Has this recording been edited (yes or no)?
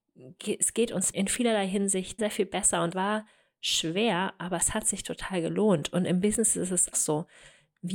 yes